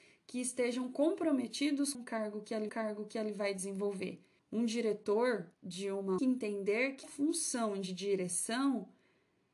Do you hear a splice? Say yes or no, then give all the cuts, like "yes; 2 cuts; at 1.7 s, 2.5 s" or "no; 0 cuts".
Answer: yes; 6 cuts; at 1.9 s, 2.7 s, 4.4 s, 5.5 s, 6.2 s, 7.0 s